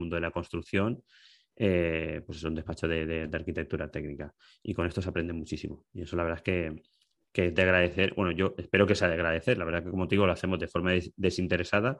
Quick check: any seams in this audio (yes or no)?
no